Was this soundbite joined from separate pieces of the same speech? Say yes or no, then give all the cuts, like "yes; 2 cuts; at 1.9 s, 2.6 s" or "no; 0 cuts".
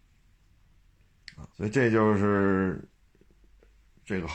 yes; 1 cut; at 1.5 s